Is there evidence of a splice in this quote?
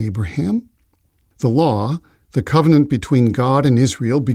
no; 0 cuts

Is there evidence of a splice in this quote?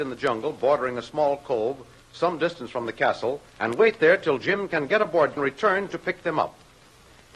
yes; 2 cuts; at 3.5 s, 5.4 s

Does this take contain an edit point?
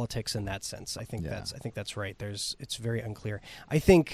no; 0 cuts

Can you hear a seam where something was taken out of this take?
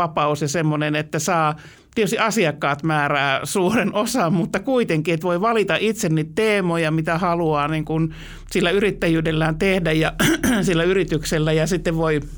yes; 1 cut; at 1.7 s

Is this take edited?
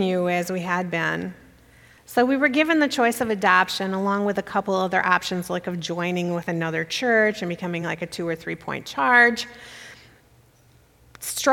no; 0 cuts

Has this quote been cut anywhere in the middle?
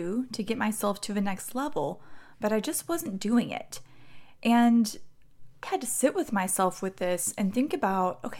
yes; 1 cut; at 5.6 s

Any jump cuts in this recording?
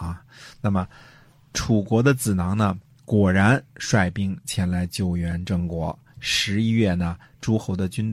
no; 0 cuts

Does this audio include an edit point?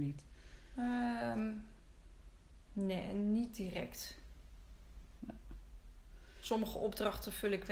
no; 0 cuts

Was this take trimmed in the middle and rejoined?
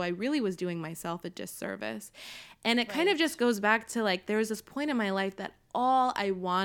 no; 0 cuts

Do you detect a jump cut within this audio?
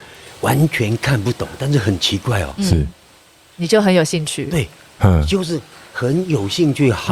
no; 0 cuts

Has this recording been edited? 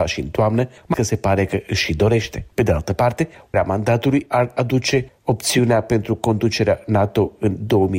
yes; 3 cuts; at 0.9 s, 2.5 s, 3.5 s

